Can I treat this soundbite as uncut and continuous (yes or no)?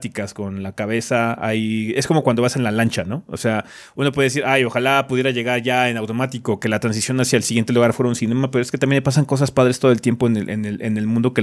yes